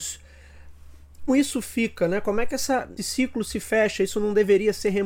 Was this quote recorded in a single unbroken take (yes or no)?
no